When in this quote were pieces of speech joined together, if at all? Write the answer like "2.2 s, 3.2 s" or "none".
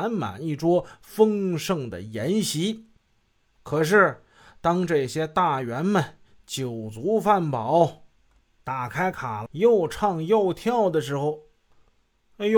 9.5 s